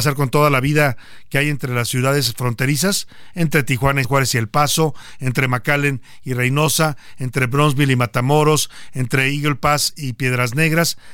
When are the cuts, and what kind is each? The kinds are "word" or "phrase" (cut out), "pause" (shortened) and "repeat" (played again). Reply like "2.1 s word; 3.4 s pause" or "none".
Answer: 4.0 s phrase